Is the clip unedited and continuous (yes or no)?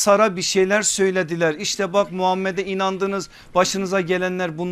yes